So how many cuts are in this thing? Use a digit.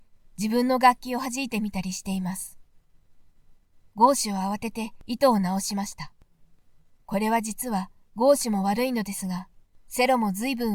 0